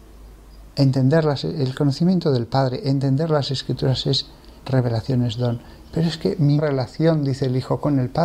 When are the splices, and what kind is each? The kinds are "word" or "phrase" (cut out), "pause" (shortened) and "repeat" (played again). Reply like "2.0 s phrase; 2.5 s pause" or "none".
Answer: 4.6 s pause; 6.6 s word